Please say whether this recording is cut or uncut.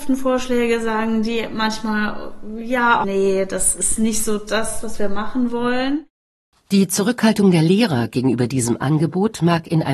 cut